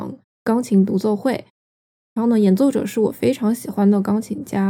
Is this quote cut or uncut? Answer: uncut